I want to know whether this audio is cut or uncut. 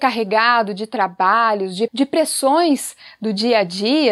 cut